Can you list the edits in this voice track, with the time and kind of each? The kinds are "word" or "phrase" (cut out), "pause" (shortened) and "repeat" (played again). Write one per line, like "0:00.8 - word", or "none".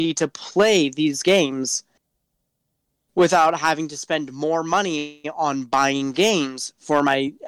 0:06.1 - word